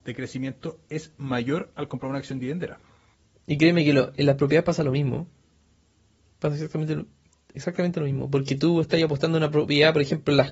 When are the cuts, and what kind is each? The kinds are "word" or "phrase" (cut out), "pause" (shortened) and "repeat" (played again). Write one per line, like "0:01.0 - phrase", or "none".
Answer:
none